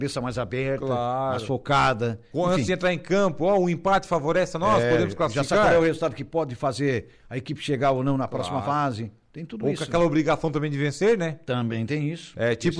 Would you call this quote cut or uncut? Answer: uncut